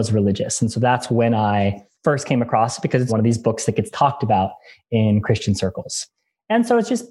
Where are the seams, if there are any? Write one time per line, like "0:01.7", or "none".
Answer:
0:03.1